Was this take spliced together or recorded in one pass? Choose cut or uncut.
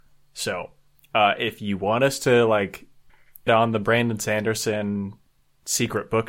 cut